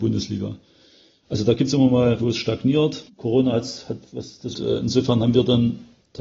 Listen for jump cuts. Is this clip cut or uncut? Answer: cut